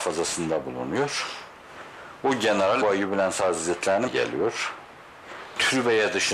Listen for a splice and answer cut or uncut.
cut